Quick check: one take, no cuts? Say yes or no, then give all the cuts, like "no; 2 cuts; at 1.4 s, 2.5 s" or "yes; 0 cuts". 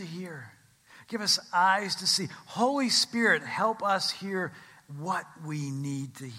yes; 0 cuts